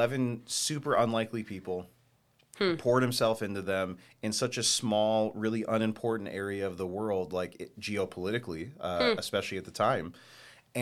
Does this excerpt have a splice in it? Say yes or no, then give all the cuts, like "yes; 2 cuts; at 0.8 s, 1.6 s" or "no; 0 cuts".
no; 0 cuts